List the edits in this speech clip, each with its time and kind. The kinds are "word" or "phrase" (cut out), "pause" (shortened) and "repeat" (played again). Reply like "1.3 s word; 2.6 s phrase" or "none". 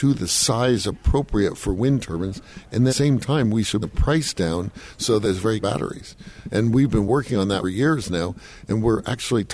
2.9 s phrase; 3.8 s phrase; 5.6 s phrase; 7.6 s phrase